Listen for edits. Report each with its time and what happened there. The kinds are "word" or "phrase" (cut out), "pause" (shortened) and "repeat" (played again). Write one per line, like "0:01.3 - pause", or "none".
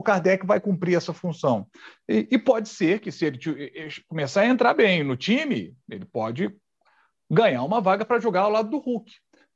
none